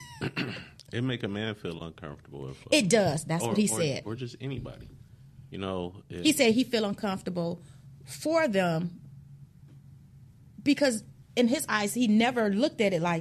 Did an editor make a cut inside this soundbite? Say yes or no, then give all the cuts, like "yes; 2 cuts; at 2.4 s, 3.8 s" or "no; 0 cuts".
no; 0 cuts